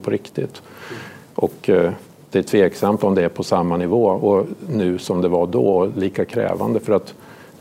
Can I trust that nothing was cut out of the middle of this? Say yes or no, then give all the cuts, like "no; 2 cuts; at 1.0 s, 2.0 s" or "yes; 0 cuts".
yes; 0 cuts